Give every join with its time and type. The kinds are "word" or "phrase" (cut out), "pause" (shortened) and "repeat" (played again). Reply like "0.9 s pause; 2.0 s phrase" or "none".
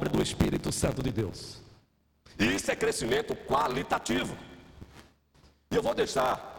none

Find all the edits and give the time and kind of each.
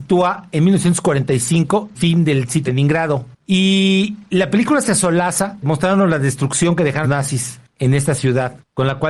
1.9 s phrase; 2.7 s word; 5.6 s word; 7.0 s word

